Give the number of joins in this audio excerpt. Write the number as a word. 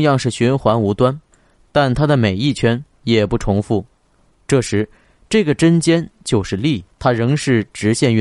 one